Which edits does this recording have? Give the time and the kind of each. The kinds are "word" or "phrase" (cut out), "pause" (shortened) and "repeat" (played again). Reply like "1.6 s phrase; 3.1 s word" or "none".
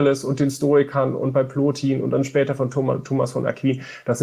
none